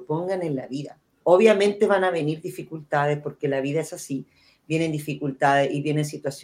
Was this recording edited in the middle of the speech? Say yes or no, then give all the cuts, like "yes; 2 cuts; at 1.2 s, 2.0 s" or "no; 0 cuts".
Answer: no; 0 cuts